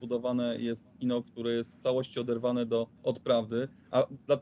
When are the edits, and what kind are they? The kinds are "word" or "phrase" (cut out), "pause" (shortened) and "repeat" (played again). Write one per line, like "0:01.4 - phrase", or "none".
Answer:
0:03.0 - pause